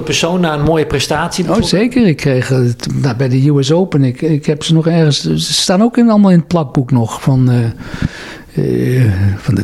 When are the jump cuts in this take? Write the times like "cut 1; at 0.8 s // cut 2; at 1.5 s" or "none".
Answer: none